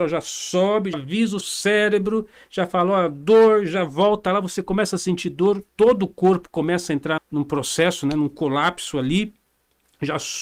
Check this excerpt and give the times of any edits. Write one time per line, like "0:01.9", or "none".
0:00.9
0:01.4
0:07.2